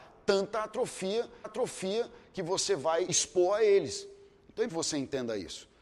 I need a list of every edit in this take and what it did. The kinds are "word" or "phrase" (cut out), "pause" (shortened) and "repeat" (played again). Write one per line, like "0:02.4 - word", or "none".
0:01.4 - repeat
0:03.1 - word
0:04.7 - word